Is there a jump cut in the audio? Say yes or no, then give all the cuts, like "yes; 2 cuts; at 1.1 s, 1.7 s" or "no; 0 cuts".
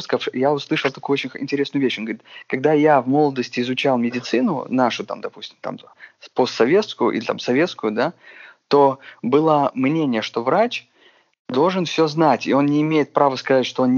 no; 0 cuts